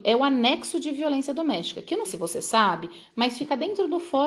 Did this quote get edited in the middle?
yes; 1 cut; at 2.0 s

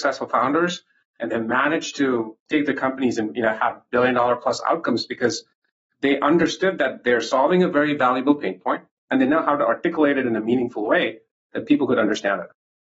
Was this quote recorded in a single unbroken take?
yes; 0 cuts

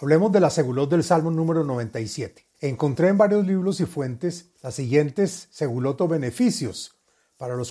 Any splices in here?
yes; 2 cuts; at 2.5 s, 4.5 s

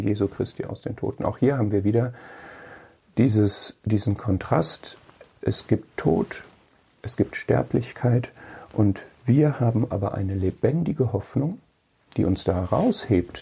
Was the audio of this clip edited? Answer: no; 0 cuts

